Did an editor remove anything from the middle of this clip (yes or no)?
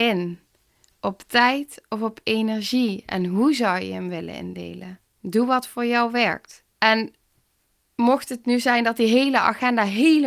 yes